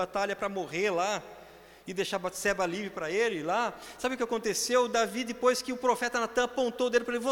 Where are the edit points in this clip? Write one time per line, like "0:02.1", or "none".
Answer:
none